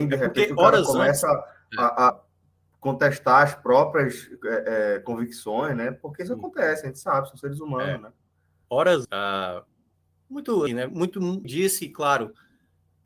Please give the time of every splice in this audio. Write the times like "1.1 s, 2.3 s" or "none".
2.1 s, 9.0 s, 10.7 s, 11.4 s